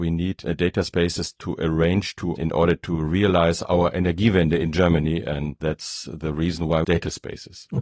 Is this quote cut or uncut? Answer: cut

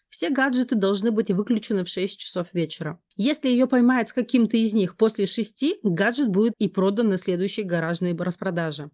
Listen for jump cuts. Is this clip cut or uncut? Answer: cut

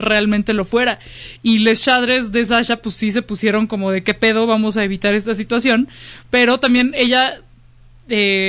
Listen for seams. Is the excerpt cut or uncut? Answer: uncut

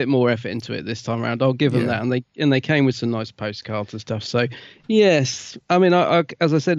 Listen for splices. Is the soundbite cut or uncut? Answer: uncut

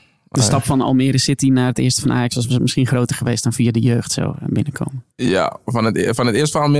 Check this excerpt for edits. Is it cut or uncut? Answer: cut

